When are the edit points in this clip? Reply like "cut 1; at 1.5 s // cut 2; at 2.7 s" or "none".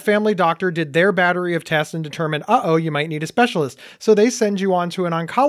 none